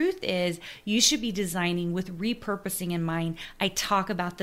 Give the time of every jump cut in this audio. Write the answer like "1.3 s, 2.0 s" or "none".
none